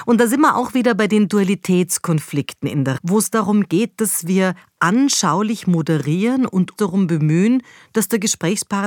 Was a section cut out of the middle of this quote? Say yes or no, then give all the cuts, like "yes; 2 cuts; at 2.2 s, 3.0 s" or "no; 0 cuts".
yes; 2 cuts; at 3.0 s, 6.8 s